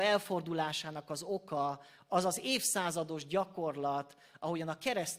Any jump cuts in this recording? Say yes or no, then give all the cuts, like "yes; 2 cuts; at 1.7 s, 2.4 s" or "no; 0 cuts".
no; 0 cuts